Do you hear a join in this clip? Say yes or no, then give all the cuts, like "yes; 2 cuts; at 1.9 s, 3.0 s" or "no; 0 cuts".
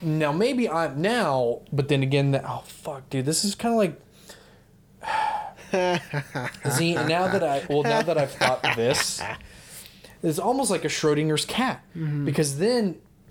yes; 1 cut; at 11.9 s